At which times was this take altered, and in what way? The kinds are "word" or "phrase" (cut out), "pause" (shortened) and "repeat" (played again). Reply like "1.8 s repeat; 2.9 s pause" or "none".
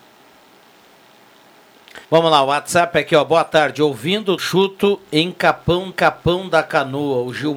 2.0 s pause; 4.4 s phrase; 5.9 s repeat